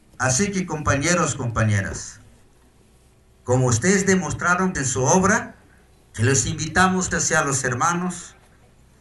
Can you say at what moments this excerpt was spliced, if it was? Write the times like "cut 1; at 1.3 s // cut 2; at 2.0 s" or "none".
cut 1; at 4.7 s // cut 2; at 7.1 s